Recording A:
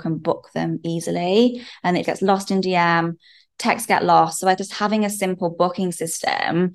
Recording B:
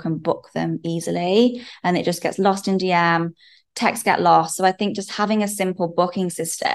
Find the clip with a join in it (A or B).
A